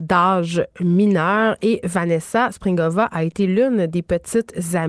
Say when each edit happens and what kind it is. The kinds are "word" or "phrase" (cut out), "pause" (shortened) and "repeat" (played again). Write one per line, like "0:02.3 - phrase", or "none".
none